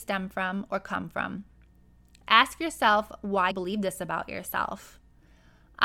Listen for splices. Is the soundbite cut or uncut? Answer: cut